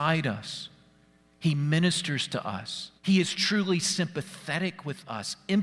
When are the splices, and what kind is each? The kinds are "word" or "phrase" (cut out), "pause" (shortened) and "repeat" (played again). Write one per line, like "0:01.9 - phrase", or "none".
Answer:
0:03.0 - pause